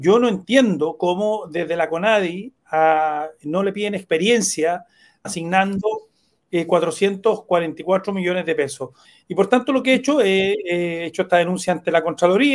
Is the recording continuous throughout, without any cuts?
no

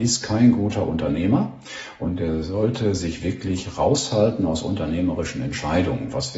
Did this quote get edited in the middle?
no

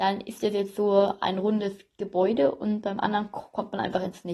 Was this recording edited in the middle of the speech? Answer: no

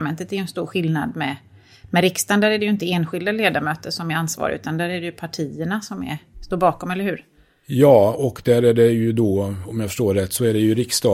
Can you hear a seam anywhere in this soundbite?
no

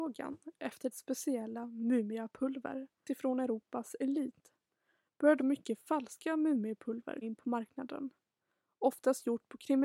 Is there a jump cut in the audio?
yes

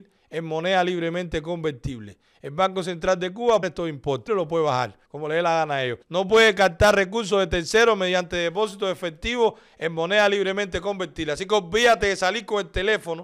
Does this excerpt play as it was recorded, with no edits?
no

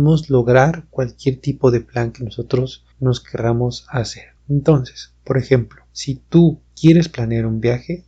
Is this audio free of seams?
no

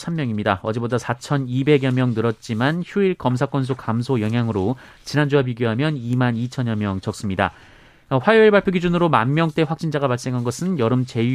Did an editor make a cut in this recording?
no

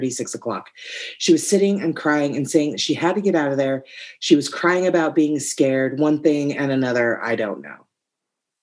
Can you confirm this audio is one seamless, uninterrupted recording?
yes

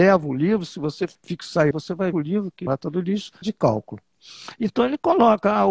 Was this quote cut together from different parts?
yes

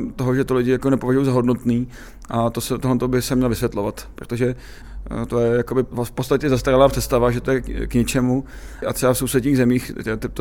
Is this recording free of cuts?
yes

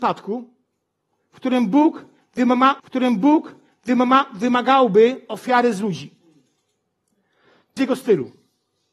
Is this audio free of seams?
no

